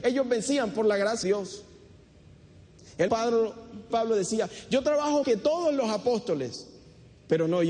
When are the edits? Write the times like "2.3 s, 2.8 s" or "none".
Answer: 1.2 s, 3.1 s, 3.9 s, 5.2 s